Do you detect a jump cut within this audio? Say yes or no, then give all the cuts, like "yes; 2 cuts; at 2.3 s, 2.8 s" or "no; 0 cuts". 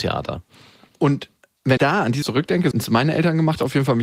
yes; 3 cuts; at 1.8 s, 2.2 s, 2.7 s